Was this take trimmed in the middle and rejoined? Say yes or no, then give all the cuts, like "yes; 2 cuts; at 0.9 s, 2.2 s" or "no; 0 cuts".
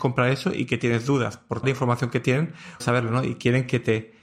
yes; 2 cuts; at 1.6 s, 2.8 s